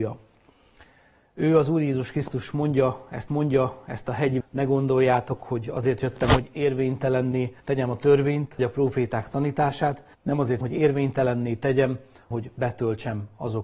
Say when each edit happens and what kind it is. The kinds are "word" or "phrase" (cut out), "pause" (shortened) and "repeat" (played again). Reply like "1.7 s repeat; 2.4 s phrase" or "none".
3.3 s repeat; 4.4 s word; 7.6 s pause; 8.6 s word; 10.1 s pause; 10.6 s word; 12.3 s word